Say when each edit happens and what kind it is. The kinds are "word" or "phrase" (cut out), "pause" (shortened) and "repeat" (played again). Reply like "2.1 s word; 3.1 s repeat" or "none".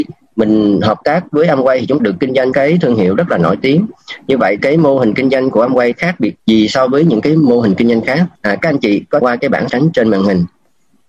2.0 s word; 2.5 s word; 4.6 s word; 5.9 s phrase; 6.4 s pause; 8.4 s pause; 9.2 s phrase; 9.7 s word